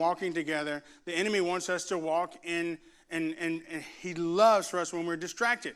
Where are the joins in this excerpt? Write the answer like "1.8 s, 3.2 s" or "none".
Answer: none